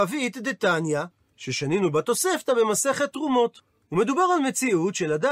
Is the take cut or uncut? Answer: uncut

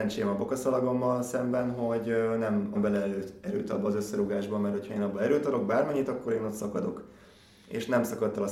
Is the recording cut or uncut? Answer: cut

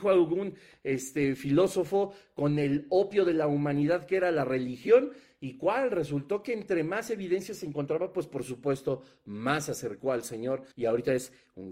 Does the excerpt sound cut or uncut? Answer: cut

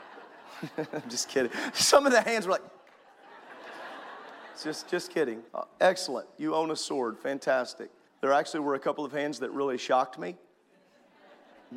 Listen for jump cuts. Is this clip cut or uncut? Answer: cut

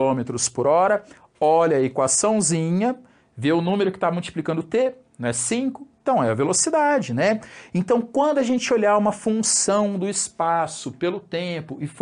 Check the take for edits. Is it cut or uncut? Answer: uncut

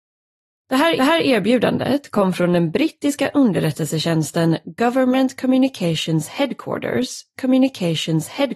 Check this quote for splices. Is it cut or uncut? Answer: cut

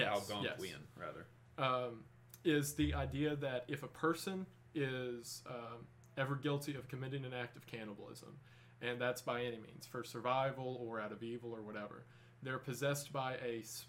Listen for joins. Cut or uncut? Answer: uncut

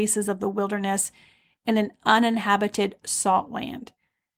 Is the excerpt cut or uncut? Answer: uncut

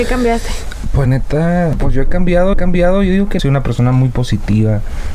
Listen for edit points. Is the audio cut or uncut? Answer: cut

